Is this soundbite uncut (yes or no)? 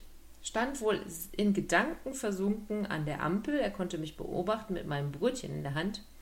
yes